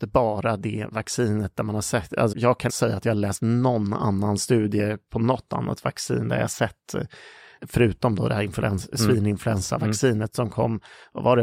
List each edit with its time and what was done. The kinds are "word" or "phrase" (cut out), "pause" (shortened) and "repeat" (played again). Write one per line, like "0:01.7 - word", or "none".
0:02.3 - word
0:02.7 - word
0:07.6 - word